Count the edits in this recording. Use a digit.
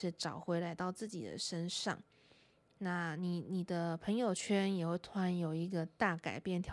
0